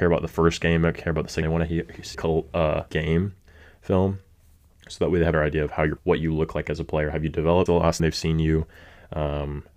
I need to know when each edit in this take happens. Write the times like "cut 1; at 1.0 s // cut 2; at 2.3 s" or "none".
cut 1; at 1.4 s // cut 2; at 2.1 s // cut 3; at 2.9 s // cut 4; at 5.3 s // cut 5; at 6.0 s // cut 6; at 7.7 s // cut 7; at 8.0 s